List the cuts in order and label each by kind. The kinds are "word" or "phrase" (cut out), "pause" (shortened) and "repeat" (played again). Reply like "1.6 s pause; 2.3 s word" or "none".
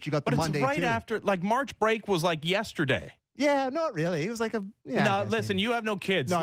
none